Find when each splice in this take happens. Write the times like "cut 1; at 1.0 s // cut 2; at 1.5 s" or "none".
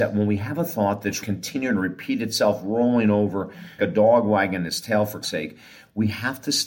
cut 1; at 1.2 s // cut 2; at 3.8 s // cut 3; at 5.2 s